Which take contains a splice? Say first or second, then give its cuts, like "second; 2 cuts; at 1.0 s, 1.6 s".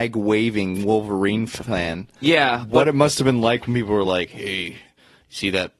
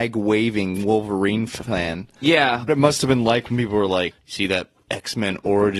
second; 2 cuts; at 2.7 s, 4.1 s